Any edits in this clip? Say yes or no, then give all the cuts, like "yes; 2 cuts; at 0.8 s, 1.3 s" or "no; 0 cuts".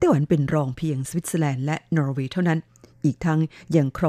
no; 0 cuts